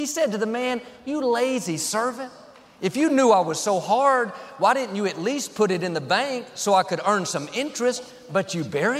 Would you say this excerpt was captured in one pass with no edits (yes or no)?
yes